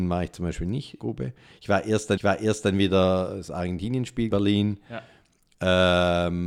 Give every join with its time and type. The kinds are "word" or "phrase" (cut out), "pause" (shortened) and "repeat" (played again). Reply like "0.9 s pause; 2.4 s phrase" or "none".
1.0 s word; 2.2 s repeat; 4.3 s phrase